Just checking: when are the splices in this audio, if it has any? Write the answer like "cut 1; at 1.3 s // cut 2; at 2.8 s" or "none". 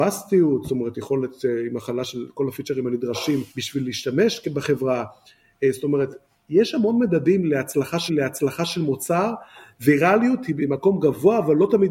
cut 1; at 3.5 s // cut 2; at 8.1 s